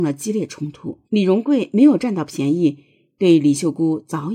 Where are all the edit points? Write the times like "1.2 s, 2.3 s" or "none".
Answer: 1.0 s